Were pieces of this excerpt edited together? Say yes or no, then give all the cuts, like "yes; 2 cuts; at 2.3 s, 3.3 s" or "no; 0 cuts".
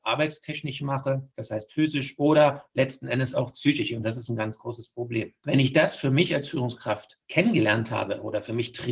no; 0 cuts